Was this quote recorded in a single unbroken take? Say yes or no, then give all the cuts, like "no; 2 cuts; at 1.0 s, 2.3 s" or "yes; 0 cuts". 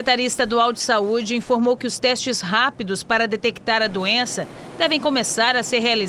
yes; 0 cuts